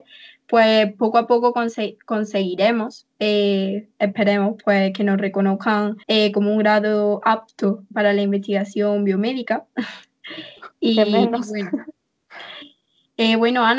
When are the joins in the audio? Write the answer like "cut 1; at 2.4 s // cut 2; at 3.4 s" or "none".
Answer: cut 1; at 6.0 s